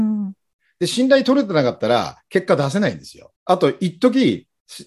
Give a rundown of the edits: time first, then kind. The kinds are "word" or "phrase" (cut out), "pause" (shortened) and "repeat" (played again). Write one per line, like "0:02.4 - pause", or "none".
0:03.4 - pause